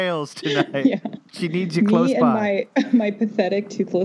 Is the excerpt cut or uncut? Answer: uncut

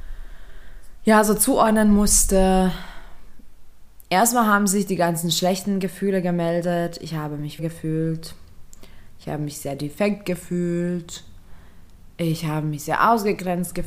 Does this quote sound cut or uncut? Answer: cut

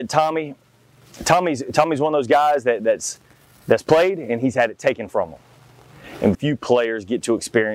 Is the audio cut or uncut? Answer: cut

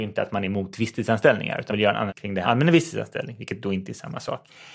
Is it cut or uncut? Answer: cut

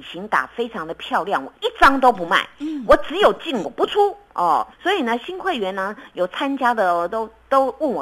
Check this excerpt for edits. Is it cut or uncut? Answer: cut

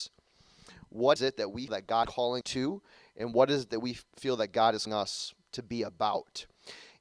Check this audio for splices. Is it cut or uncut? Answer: cut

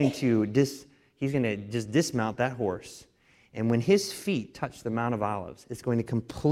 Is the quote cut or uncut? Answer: uncut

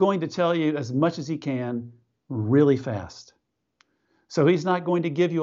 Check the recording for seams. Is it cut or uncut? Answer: uncut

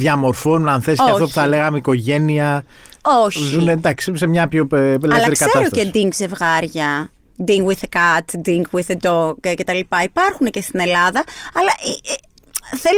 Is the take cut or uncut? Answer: uncut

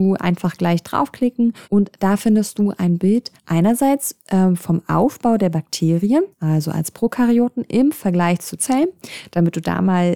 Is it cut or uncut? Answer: cut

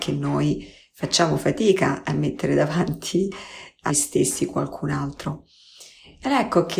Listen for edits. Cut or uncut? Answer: cut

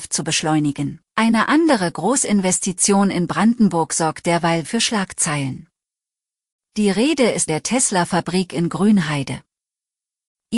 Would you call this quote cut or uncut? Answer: cut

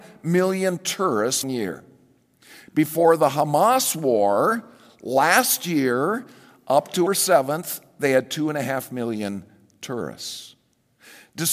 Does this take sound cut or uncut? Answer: cut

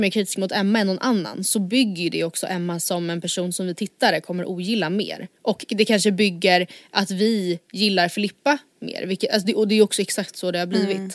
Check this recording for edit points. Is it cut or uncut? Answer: cut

